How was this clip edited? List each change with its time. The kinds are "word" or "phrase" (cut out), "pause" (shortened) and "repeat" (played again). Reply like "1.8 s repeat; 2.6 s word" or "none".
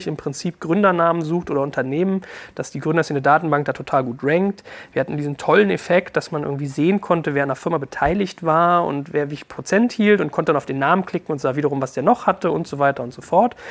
none